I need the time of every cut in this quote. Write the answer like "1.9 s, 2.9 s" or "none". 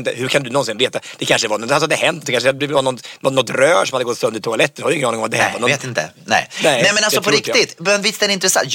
none